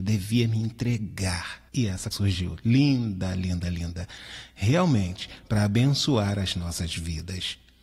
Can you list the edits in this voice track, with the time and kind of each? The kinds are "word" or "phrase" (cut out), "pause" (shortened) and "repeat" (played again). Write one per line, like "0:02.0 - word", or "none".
0:01.7 - pause
0:02.1 - word